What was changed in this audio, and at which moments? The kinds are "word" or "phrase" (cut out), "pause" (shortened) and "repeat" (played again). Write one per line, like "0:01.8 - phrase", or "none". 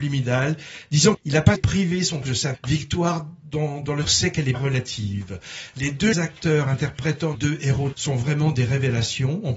0:01.1 - word
0:01.6 - word
0:02.2 - word
0:02.5 - word
0:04.0 - word
0:04.5 - word
0:06.1 - word
0:07.3 - word
0:07.9 - word